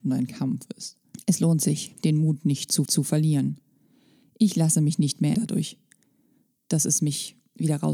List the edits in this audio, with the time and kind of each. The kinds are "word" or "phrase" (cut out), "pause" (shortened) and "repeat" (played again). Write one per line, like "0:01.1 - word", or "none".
0:02.9 - repeat
0:05.3 - word